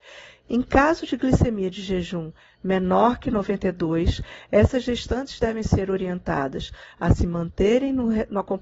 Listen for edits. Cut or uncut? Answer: uncut